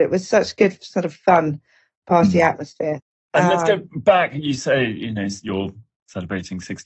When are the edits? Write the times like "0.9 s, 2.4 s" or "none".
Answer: none